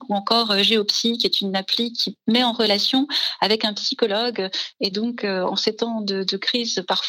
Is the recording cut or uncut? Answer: uncut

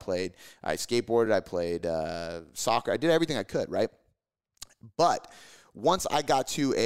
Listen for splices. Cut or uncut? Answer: uncut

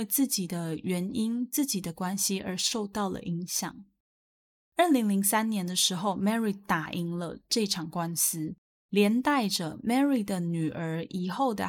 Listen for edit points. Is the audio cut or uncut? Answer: uncut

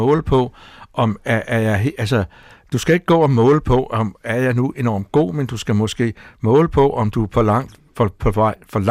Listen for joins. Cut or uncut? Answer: uncut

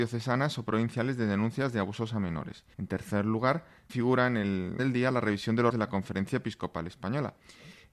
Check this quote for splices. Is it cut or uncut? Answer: cut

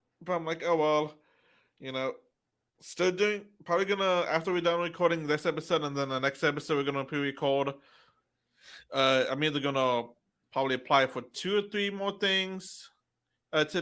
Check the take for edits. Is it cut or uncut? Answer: uncut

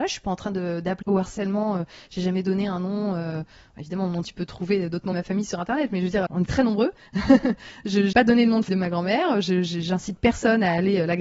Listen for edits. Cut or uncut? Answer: cut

